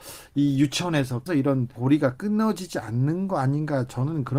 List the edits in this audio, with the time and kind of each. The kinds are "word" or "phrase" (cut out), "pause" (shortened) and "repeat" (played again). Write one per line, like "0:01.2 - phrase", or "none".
0:01.3 - word
0:01.8 - word